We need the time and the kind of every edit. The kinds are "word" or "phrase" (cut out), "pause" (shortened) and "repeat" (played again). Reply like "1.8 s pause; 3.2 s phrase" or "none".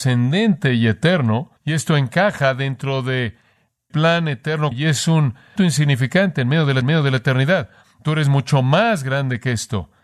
1.6 s pause; 3.9 s word; 4.7 s word; 5.6 s word; 6.8 s repeat